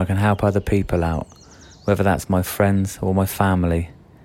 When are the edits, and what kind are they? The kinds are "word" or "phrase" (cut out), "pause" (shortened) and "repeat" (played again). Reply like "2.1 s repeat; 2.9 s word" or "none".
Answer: none